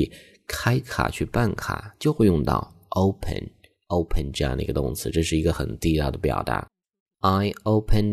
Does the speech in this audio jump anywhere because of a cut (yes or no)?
no